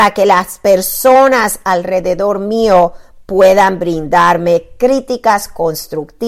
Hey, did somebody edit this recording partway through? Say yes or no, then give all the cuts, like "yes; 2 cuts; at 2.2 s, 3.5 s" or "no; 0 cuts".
no; 0 cuts